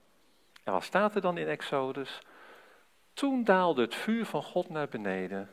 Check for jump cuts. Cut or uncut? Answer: uncut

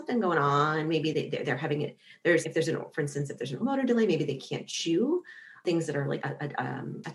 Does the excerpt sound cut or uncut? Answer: cut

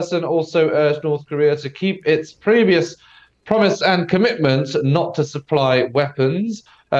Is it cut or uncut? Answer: uncut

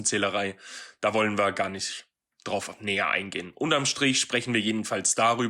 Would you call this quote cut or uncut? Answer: uncut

